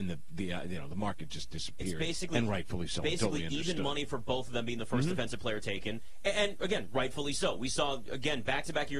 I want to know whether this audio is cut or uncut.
uncut